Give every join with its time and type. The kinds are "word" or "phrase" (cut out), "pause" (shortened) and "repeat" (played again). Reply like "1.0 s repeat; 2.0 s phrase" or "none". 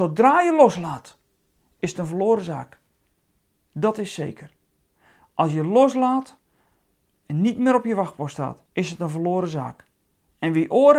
8.7 s pause